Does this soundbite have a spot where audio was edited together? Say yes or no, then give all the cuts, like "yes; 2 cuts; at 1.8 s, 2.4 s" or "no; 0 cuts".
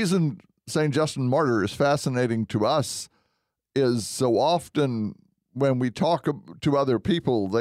no; 0 cuts